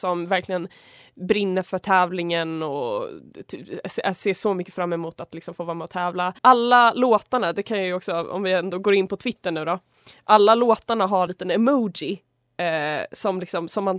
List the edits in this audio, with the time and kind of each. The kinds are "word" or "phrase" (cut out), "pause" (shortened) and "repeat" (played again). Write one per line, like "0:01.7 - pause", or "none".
0:06.4 - pause
0:11.3 - phrase